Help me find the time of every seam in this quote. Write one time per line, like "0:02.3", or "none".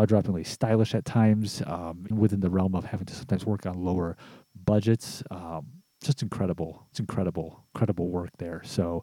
0:02.1
0:06.9